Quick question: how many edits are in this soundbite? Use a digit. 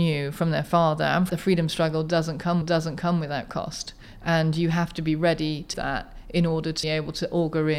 4